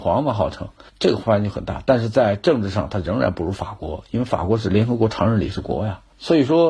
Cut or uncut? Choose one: uncut